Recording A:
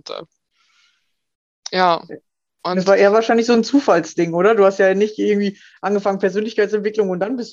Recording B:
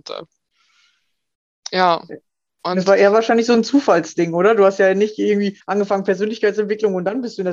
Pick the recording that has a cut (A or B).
B